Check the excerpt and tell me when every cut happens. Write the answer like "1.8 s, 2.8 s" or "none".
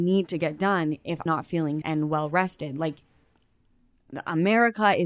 1.3 s, 1.8 s